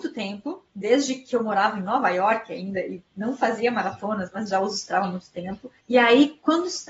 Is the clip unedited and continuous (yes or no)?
yes